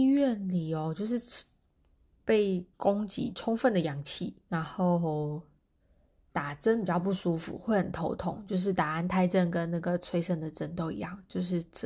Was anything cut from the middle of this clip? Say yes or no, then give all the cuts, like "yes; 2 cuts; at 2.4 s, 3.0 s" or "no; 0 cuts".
yes; 3 cuts; at 2.7 s, 4.4 s, 5.8 s